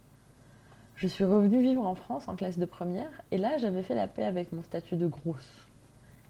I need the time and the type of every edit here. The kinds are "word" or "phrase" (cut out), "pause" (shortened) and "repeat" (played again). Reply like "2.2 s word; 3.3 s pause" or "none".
3.3 s pause